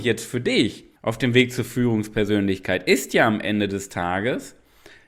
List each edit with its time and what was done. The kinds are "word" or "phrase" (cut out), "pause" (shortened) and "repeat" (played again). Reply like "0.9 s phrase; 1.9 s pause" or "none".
1.0 s pause